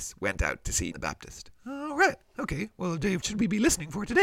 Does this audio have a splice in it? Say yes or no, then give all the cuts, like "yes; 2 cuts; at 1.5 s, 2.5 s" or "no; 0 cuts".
yes; 3 cuts; at 0.9 s, 1.6 s, 3.2 s